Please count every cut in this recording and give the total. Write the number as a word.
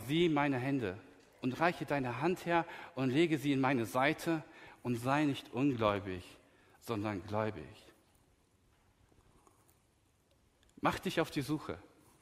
zero